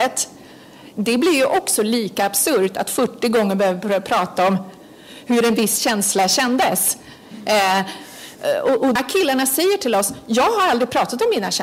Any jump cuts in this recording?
yes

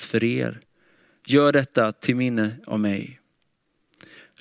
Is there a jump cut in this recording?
no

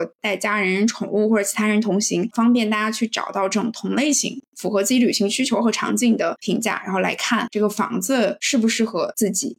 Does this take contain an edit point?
no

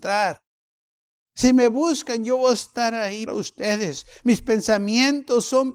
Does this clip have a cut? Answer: yes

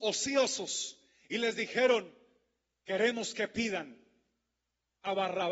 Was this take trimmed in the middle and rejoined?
no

